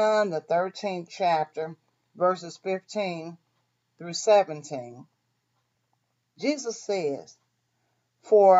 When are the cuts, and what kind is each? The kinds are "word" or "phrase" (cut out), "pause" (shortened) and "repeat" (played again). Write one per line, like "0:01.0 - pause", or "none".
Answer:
none